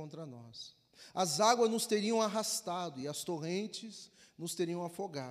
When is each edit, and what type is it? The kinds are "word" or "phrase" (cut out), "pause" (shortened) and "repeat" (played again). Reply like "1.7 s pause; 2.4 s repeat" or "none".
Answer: none